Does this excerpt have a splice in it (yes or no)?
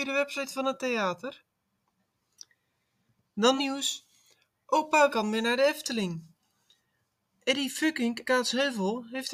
yes